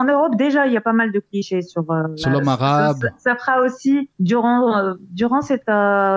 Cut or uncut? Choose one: cut